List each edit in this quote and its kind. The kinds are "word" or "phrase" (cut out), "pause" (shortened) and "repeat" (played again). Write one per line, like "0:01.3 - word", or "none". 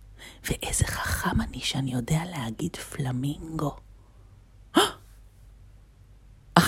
none